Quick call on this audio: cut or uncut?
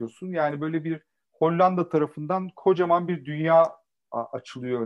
uncut